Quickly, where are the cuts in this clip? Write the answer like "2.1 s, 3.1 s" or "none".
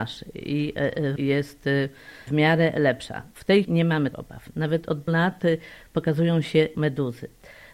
1.2 s, 2.3 s, 3.3 s, 3.6 s, 4.1 s, 5.1 s, 6.7 s